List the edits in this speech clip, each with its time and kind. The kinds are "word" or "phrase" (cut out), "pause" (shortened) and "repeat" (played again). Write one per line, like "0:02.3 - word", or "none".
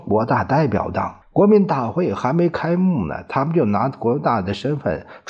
0:01.2 - pause